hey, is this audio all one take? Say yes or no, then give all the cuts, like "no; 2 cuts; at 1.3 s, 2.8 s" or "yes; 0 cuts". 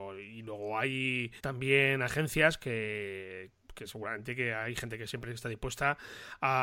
no; 1 cut; at 1.4 s